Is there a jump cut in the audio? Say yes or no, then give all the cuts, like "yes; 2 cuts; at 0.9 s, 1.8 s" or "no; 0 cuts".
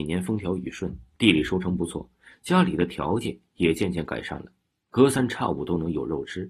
no; 0 cuts